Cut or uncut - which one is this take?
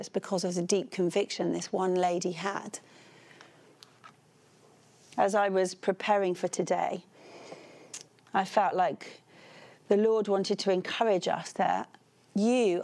uncut